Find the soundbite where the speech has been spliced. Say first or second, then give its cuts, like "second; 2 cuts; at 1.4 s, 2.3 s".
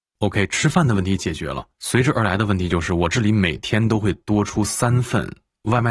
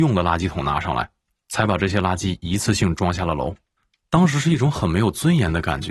first; 1 cut; at 1.7 s